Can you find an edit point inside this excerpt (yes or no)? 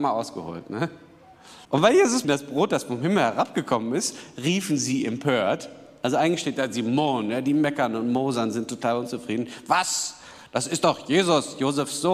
yes